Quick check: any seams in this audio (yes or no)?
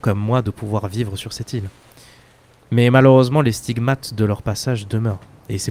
no